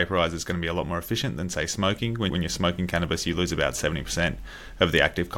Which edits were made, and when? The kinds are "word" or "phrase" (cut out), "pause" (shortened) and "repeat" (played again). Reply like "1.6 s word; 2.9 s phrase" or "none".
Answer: 2.3 s word